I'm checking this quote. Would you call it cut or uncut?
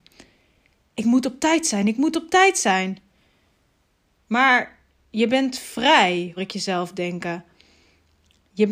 cut